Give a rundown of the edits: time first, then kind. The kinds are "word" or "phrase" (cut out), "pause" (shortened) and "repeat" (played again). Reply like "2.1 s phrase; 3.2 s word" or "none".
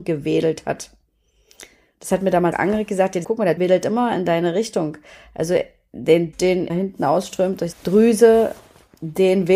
2.5 s word; 3.2 s word; 3.6 s word; 6.3 s word; 6.7 s word; 7.7 s word